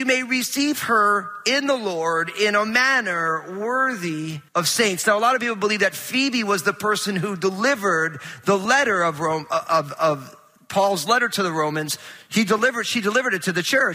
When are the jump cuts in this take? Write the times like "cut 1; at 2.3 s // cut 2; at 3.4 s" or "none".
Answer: cut 1; at 4.5 s